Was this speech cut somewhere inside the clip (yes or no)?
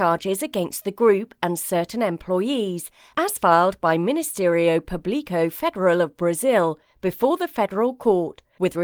no